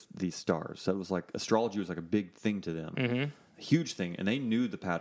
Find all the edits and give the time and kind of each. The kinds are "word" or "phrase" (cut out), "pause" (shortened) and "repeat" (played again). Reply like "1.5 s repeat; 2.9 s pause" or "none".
none